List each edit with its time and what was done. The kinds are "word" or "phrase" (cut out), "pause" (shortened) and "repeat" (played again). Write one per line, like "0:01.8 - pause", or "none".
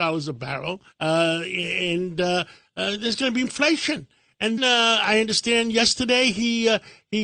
0:00.9 - pause
0:03.4 - word
0:04.6 - word